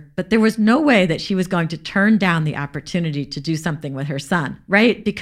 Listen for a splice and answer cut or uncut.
uncut